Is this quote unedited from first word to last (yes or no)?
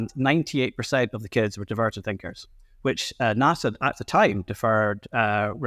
yes